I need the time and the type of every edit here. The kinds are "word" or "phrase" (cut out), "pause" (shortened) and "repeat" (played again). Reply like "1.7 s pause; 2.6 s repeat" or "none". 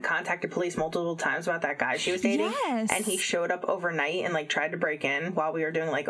none